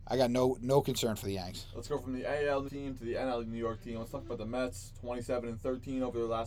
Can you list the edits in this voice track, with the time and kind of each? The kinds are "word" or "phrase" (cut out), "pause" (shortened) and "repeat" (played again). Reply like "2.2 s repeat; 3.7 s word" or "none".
2.7 s word